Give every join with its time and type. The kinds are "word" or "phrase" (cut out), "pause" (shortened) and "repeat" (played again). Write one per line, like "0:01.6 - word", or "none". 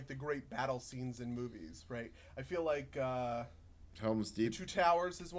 0:03.9 - pause